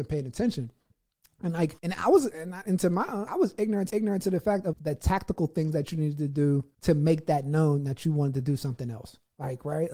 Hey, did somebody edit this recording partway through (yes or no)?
yes